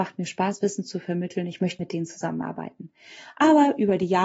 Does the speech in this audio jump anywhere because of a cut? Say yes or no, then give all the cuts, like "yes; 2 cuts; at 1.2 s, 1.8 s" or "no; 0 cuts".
yes; 1 cut; at 1.8 s